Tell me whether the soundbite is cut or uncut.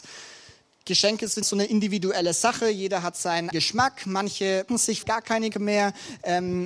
cut